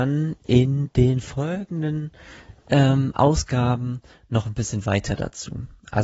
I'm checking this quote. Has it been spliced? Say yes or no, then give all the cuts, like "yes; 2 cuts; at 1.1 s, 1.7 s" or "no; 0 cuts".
no; 0 cuts